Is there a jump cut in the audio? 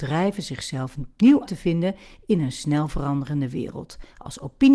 yes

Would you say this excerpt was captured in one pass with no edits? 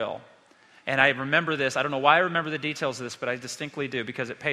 yes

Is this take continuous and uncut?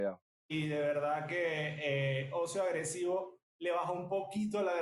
yes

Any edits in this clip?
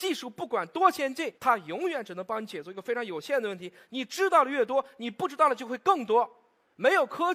yes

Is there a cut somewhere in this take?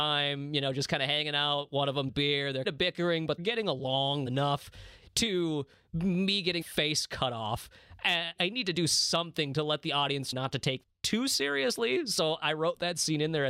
yes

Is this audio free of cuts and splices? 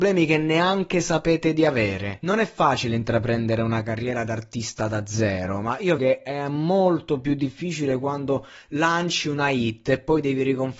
no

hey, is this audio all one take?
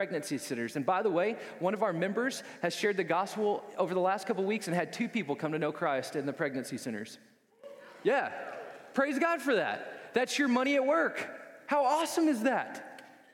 yes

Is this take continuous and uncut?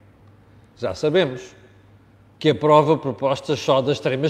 yes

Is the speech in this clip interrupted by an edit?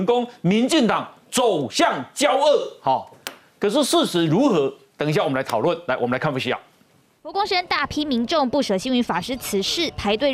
no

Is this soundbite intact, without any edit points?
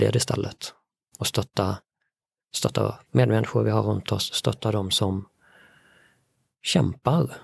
no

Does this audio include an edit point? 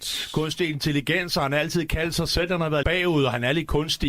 yes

